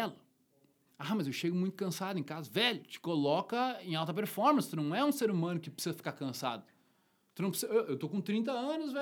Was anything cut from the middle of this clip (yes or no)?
no